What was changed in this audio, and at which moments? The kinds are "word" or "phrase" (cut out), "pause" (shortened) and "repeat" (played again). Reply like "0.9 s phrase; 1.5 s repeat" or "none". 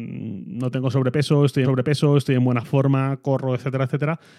1.6 s repeat